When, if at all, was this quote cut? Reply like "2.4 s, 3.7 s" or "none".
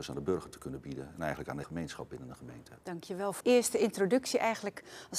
1.6 s, 2.8 s, 3.4 s